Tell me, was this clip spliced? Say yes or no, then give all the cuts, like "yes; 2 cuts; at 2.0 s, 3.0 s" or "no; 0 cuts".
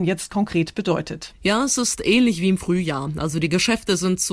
no; 0 cuts